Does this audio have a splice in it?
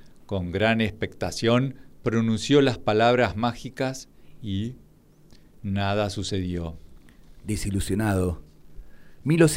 no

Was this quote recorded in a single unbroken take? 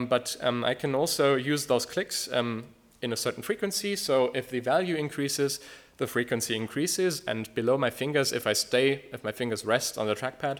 yes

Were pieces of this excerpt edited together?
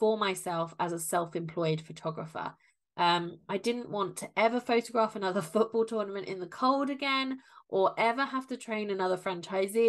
no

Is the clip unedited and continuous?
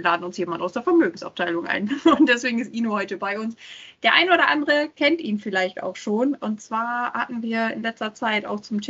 yes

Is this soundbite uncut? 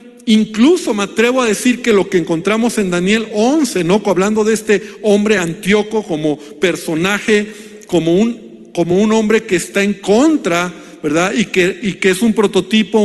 yes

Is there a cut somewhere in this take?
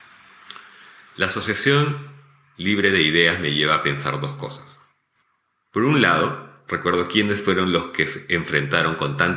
no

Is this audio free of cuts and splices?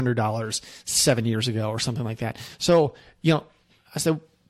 yes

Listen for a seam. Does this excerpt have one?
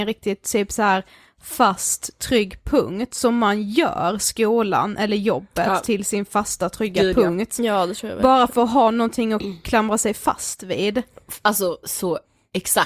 no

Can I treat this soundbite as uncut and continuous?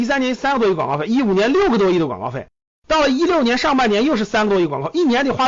yes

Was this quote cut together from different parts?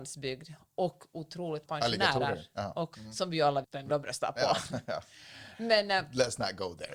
yes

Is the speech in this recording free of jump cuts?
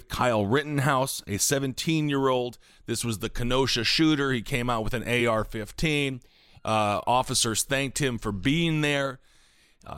yes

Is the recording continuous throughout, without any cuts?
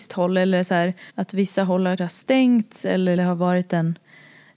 no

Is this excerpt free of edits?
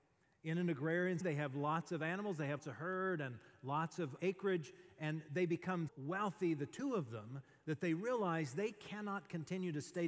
no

